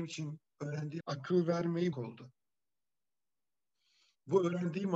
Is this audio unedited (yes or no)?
no